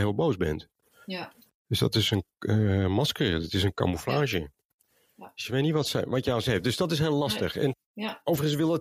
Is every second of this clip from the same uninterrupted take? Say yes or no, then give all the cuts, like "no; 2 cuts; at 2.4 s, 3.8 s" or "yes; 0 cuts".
yes; 0 cuts